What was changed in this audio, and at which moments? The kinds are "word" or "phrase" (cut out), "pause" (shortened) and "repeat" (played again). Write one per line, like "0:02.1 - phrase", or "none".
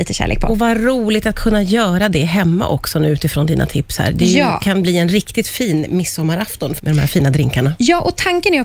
0:06.8 - word